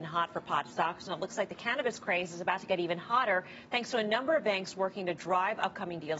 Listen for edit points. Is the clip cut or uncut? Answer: uncut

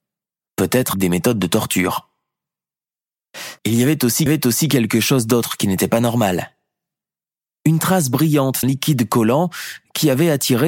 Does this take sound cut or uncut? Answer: cut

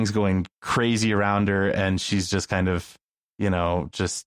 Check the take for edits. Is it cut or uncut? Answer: uncut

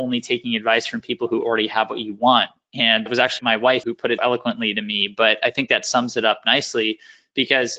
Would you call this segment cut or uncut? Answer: cut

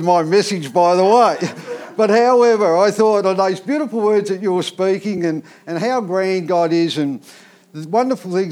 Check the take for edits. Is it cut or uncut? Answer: uncut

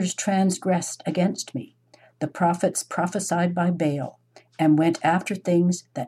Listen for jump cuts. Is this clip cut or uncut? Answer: uncut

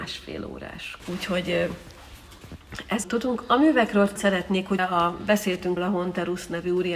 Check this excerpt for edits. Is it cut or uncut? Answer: cut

